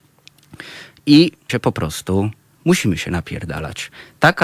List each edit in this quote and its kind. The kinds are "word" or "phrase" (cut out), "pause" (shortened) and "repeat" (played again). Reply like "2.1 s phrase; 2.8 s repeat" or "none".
1.5 s word; 2.6 s word

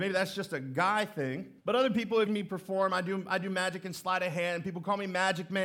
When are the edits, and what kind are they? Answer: 1.6 s pause; 2.3 s phrase

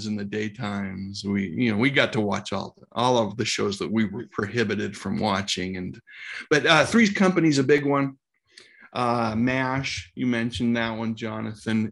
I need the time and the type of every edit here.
none

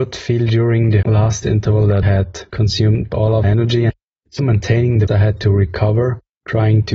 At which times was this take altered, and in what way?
1.0 s word; 1.4 s word; 2.0 s word; 3.1 s word; 3.4 s word; 4.4 s word; 5.1 s word

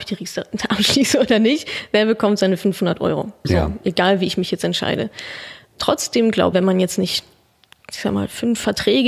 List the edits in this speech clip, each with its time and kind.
6.5 s phrase

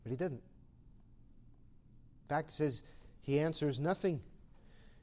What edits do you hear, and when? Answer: none

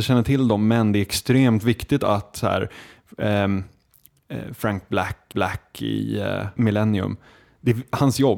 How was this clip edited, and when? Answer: 5.3 s repeat; 6.6 s word

